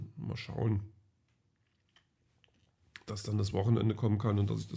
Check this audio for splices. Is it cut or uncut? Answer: uncut